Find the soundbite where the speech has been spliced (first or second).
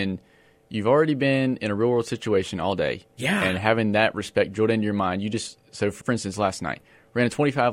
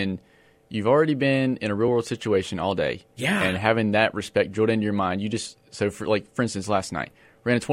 first